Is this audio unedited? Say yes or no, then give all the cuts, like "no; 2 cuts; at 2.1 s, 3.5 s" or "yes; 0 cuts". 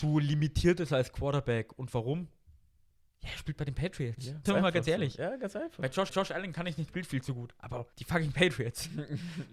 no; 4 cuts; at 4.5 s, 6.1 s, 6.9 s, 7.9 s